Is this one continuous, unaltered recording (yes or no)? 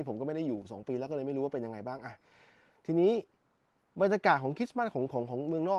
yes